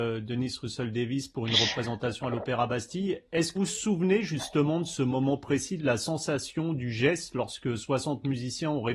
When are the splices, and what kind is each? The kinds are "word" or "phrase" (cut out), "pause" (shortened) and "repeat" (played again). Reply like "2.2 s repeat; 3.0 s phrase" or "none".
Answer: 3.6 s word

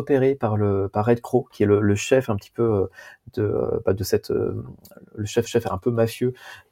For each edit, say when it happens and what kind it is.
5.5 s repeat

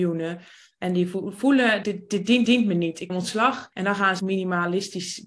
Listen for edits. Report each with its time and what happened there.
1.8 s word; 2.4 s repeat; 3.1 s word; 3.7 s pause; 4.2 s phrase

